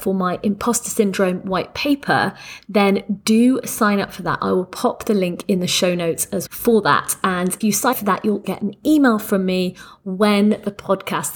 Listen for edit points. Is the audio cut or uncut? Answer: cut